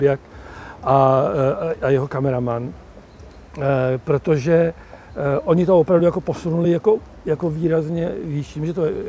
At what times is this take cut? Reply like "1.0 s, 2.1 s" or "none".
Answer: none